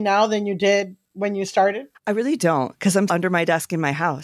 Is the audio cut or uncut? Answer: cut